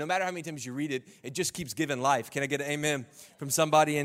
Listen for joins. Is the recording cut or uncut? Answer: uncut